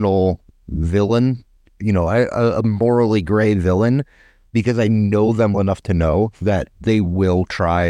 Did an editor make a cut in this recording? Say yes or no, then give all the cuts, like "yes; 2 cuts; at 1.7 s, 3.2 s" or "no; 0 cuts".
yes; 1 cut; at 5.5 s